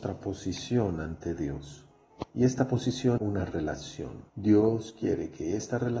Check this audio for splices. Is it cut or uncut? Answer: cut